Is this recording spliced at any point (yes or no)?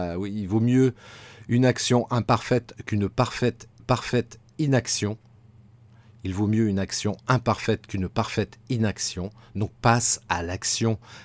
yes